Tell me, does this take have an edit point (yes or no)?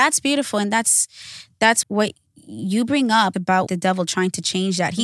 yes